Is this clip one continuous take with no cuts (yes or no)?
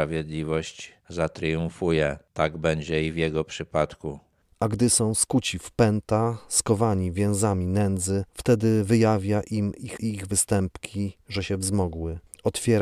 no